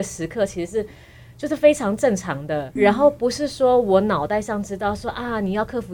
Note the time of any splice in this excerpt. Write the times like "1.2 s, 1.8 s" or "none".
2.8 s